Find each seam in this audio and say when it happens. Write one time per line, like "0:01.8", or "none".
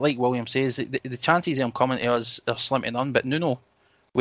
none